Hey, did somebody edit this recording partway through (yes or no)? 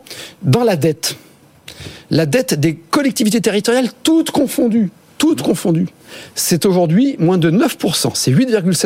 no